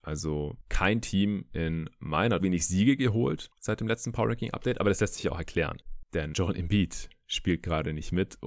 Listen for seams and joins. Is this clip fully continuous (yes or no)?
no